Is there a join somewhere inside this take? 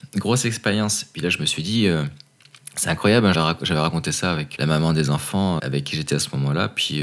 yes; 3 cuts; at 3.3 s, 4.6 s, 5.6 s

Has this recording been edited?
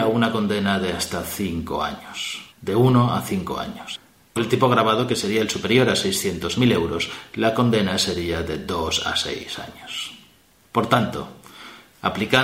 yes; 2 cuts; at 2.5 s, 4.4 s

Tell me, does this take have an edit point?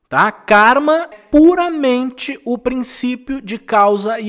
yes; 1 cut; at 1.1 s

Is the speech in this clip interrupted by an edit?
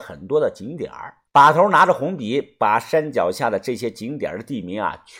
yes; 1 cut; at 1.3 s

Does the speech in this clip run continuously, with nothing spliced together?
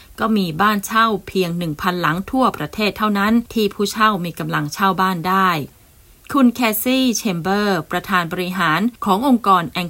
yes; 0 cuts

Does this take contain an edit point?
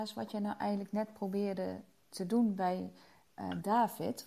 no; 0 cuts

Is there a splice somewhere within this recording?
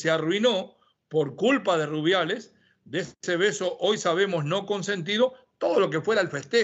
no; 0 cuts

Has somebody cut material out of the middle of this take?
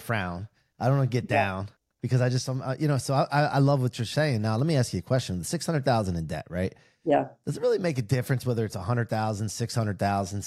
no; 0 cuts

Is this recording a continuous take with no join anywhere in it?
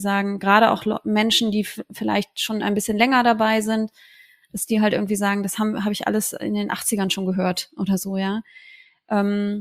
yes; 0 cuts

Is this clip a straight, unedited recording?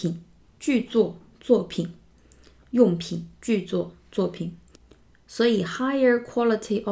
yes; 0 cuts

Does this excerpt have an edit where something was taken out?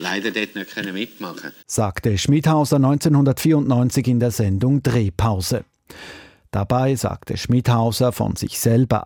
no; 0 cuts

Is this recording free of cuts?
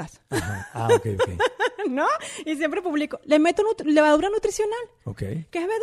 yes; 0 cuts

